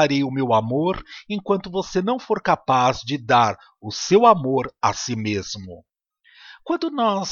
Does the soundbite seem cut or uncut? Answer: uncut